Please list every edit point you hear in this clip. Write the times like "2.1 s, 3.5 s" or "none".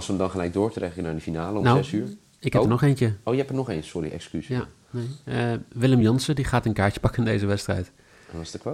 none